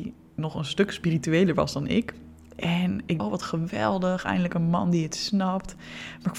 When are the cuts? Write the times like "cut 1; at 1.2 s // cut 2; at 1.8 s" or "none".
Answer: cut 1; at 3.2 s